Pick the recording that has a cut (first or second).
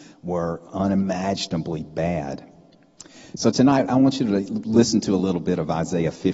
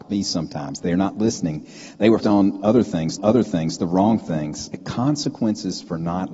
second